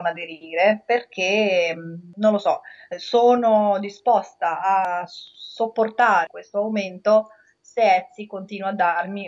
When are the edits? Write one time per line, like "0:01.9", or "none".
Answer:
none